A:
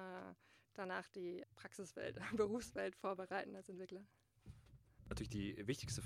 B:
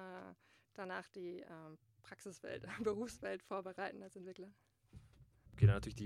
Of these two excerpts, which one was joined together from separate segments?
A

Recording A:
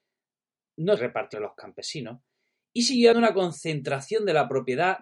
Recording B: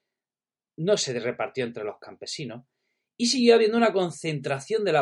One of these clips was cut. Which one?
A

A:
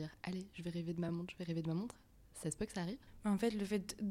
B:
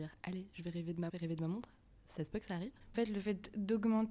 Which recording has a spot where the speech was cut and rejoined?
B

